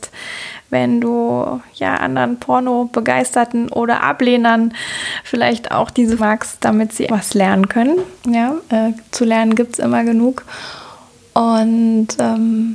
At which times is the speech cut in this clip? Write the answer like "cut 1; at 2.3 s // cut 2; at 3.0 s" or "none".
cut 1; at 6.2 s // cut 2; at 7.1 s // cut 3; at 8.2 s // cut 4; at 9.1 s